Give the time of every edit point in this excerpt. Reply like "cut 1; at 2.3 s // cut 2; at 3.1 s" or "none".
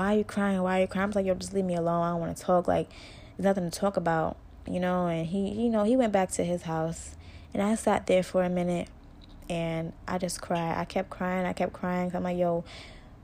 none